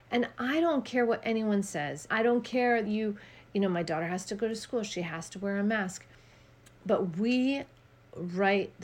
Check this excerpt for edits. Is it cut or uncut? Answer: cut